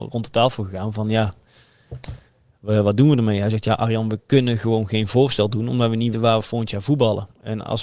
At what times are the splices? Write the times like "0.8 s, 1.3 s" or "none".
6.1 s

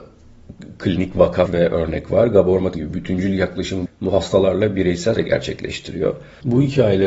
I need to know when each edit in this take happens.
1.5 s, 2.7 s, 3.9 s, 5.1 s

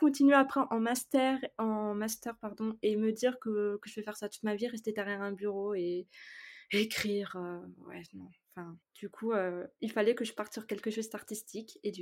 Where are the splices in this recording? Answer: 8.8 s

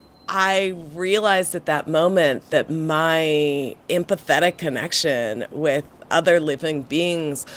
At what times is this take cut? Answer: 3.8 s

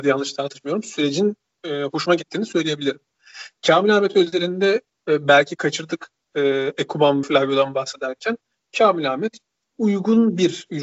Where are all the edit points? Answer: 7.2 s

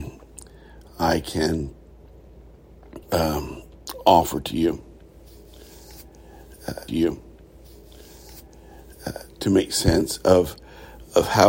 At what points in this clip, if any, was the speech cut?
3.0 s, 6.9 s

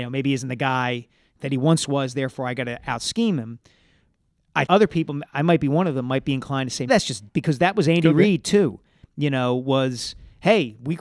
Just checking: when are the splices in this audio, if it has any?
4.7 s, 5.3 s, 6.9 s, 7.3 s

